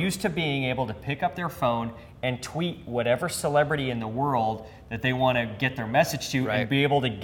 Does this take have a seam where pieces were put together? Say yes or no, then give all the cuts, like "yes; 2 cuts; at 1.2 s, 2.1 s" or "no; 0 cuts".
no; 0 cuts